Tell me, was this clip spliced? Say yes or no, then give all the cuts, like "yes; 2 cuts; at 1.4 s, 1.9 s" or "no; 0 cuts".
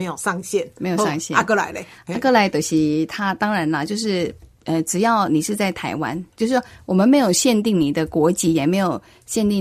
yes; 1 cut; at 6.3 s